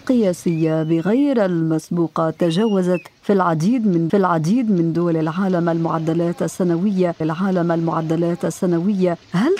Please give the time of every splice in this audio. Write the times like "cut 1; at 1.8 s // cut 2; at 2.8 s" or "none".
cut 1; at 4.1 s // cut 2; at 7.2 s